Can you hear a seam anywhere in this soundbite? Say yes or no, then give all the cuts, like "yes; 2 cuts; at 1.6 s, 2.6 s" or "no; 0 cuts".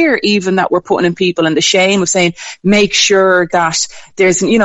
no; 0 cuts